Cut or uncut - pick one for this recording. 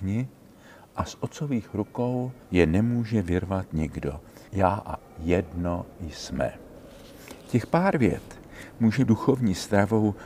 cut